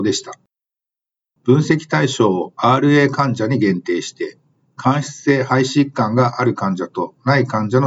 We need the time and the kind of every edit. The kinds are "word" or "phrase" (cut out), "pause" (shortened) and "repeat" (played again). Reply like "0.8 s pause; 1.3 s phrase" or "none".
none